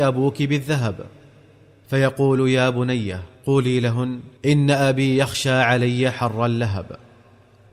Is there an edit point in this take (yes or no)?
yes